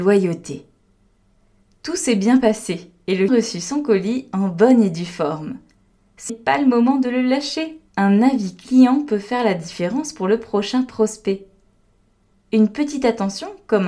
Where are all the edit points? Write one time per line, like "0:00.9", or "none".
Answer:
0:03.3
0:06.3
0:07.9